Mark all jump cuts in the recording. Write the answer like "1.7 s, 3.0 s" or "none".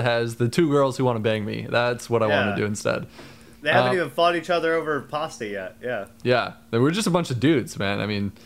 none